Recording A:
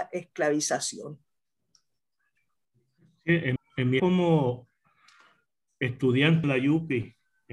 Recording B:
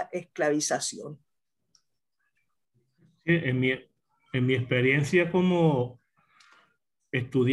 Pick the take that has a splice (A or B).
A